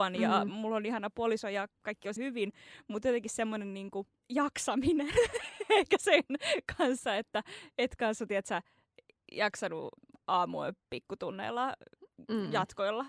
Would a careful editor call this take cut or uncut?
cut